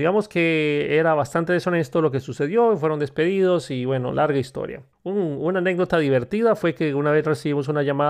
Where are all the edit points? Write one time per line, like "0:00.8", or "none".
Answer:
0:04.9